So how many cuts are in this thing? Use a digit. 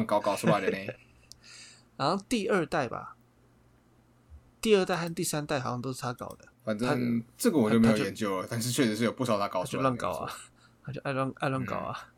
1